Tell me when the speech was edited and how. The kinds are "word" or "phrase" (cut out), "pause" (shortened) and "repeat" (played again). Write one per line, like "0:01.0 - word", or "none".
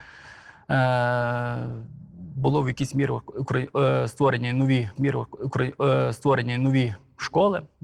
0:05.0 - repeat